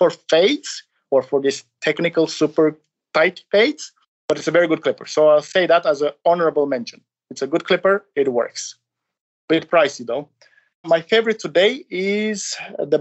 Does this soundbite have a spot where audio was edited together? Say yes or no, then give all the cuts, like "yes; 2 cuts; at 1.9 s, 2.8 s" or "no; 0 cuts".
yes; 2 cuts; at 4.0 s, 10.8 s